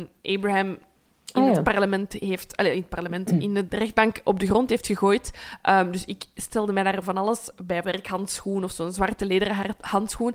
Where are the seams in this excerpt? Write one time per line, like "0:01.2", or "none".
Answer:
0:03.7
0:07.8